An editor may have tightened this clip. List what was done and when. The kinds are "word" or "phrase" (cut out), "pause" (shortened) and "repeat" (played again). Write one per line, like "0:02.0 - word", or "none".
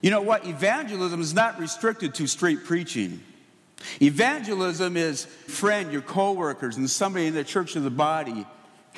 0:05.5 - phrase